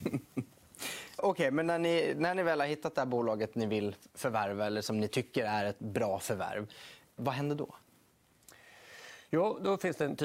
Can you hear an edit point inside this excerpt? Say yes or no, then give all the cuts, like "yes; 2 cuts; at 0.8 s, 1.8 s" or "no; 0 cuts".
yes; 2 cuts; at 1.2 s, 7.2 s